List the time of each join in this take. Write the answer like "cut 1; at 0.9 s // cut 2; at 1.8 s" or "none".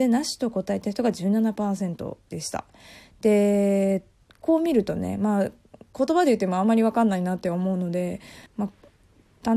cut 1; at 8.5 s